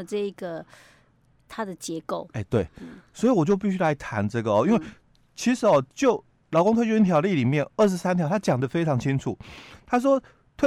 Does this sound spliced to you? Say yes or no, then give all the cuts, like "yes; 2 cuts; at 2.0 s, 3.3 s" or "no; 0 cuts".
no; 0 cuts